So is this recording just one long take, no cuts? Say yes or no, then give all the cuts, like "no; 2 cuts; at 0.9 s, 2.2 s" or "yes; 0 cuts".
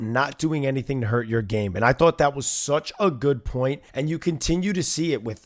no; 1 cut; at 3.9 s